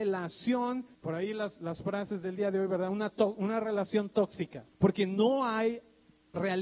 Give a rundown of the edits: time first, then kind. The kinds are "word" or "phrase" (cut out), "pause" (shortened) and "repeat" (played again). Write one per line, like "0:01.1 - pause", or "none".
0:00.9 - pause
0:04.7 - pause